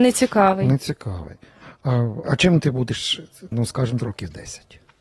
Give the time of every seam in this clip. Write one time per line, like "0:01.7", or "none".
0:02.2
0:03.5
0:04.0